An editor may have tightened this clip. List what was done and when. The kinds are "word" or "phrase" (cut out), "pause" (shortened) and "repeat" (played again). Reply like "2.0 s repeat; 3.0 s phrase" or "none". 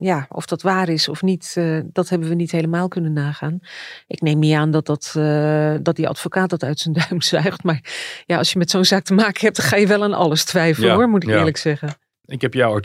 none